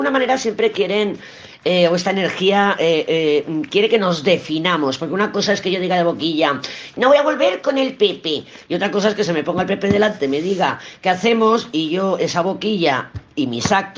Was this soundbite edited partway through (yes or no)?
no